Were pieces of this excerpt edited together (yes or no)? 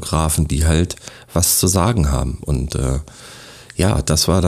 no